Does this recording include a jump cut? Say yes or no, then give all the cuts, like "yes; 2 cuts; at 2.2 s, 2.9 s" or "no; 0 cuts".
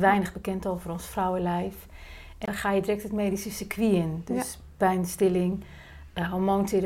no; 0 cuts